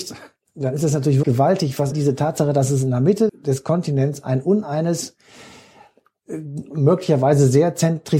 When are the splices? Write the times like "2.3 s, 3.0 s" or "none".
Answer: 1.2 s, 1.9 s, 3.3 s